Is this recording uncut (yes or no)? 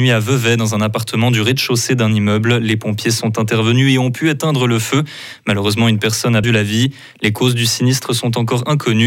no